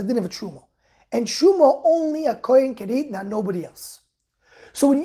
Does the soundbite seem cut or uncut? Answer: uncut